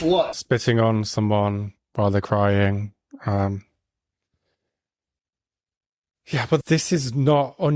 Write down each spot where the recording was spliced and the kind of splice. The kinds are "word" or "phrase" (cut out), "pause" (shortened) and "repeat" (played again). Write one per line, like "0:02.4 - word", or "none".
0:06.6 - word